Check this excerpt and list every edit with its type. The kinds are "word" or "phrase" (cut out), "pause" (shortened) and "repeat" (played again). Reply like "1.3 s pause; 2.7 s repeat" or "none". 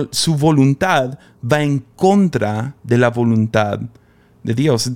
2.8 s pause

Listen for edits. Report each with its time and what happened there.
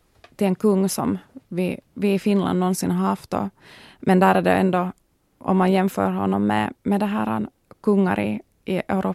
none

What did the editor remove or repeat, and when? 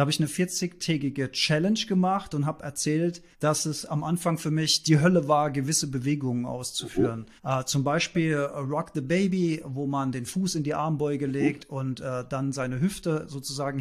3.3 s pause; 7.4 s pause

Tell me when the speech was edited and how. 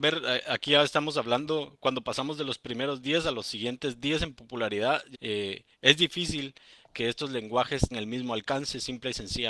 5.1 s word; 7.9 s word

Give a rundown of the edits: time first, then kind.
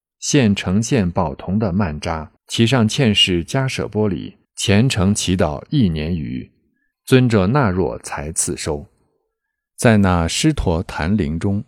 2.4 s pause; 4.4 s pause

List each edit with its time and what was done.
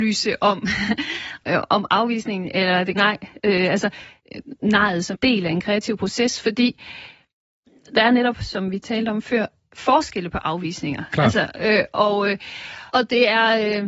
1.4 s word; 3.0 s word; 5.1 s word; 12.9 s word

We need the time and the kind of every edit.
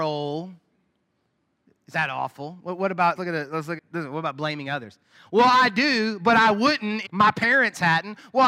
1.9 s word; 3.2 s word; 3.8 s word; 7.0 s word

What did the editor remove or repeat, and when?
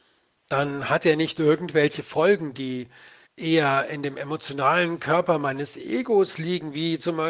3.3 s pause

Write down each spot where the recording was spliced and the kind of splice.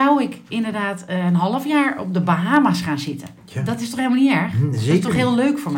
3.4 s pause

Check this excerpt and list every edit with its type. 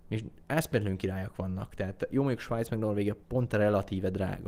3.2 s pause

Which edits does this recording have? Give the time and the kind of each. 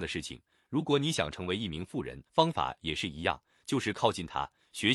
2.3 s pause

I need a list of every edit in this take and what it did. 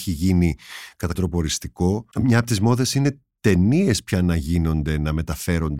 1.1 s word; 2.1 s pause

